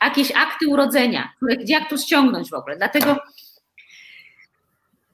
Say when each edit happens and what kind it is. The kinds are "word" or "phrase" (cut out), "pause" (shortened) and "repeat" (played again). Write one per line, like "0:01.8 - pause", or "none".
none